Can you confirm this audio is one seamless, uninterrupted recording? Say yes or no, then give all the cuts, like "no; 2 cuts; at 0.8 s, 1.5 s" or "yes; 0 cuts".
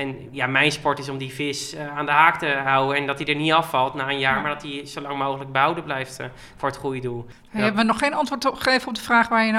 yes; 0 cuts